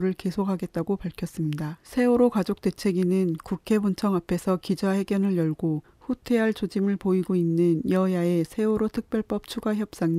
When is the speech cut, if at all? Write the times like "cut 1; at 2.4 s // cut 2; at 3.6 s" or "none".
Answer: cut 1; at 1.8 s